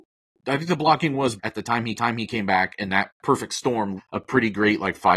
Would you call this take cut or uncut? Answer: cut